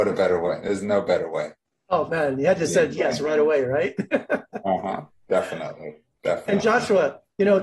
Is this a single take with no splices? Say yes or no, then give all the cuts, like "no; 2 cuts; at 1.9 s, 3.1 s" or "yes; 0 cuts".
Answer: yes; 0 cuts